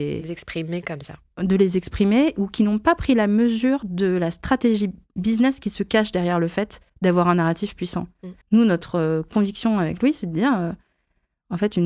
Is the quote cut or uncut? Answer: cut